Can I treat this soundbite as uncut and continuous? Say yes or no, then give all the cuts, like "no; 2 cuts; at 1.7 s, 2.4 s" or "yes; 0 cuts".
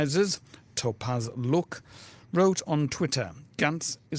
yes; 0 cuts